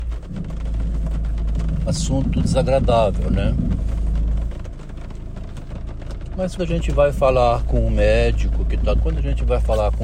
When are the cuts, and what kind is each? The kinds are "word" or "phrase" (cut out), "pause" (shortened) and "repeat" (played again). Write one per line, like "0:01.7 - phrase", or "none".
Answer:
0:01.9 - word
0:06.6 - word
0:09.0 - word

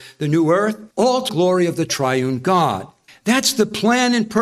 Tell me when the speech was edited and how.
0:00.9 - pause
0:01.3 - word
0:03.1 - pause

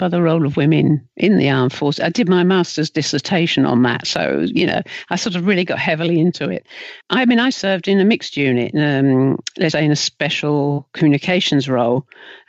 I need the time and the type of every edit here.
0:07.0 - pause
0:09.7 - word

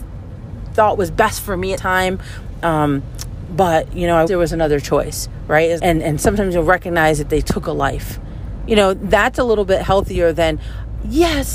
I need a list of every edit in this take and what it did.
0:01.8 - phrase
0:04.3 - word
0:05.8 - word

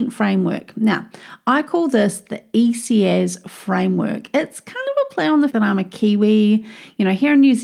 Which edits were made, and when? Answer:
0:05.5 - word

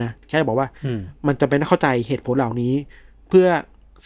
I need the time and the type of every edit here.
none

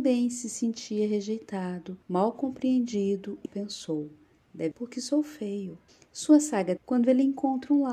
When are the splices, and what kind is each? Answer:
0:02.0 - pause
0:03.5 - word
0:04.7 - word
0:05.9 - pause
0:06.8 - word

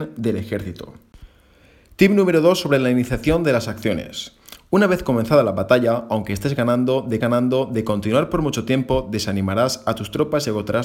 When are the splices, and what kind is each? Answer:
0:07.2 - repeat

